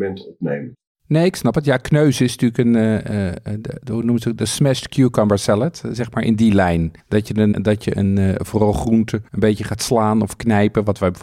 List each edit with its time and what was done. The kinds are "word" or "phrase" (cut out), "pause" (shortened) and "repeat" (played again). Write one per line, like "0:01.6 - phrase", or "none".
0:07.0 - pause
0:07.5 - word
0:09.3 - pause